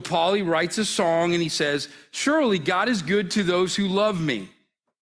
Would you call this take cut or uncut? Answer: uncut